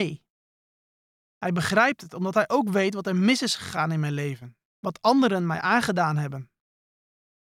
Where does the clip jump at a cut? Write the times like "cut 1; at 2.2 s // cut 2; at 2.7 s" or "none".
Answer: cut 1; at 4.7 s